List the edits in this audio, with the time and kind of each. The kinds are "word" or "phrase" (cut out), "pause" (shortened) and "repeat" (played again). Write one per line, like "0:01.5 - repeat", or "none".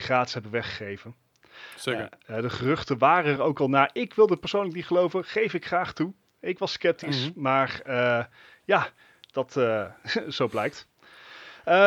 none